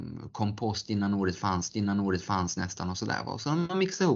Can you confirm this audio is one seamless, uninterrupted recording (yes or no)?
no